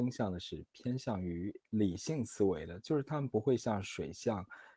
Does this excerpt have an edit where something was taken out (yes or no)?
yes